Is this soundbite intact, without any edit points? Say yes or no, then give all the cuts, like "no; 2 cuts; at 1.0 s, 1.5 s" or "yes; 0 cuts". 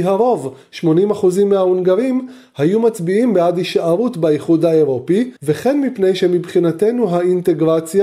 no; 1 cut; at 5.4 s